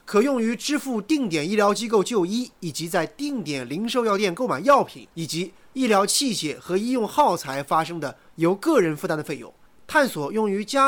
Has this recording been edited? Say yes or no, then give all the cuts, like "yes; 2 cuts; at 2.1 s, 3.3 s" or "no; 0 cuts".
yes; 2 cuts; at 5.1 s, 9.7 s